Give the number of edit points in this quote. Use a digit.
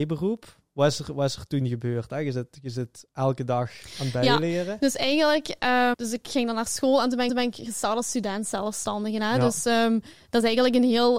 2